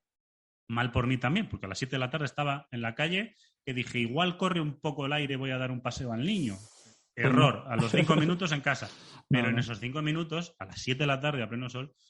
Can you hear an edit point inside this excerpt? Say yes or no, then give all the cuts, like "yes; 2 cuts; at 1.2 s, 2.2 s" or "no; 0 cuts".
no; 0 cuts